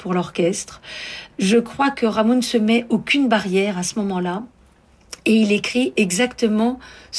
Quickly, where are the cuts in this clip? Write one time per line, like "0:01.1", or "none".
none